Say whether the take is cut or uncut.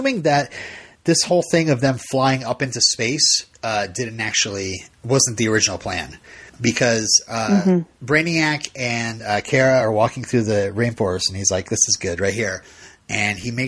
uncut